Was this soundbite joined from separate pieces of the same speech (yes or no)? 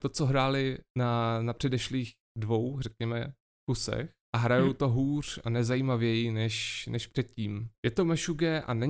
no